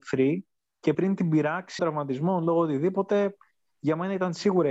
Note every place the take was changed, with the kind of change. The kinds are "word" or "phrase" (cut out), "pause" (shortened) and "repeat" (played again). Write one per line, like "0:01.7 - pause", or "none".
0:00.9 - word
0:01.8 - word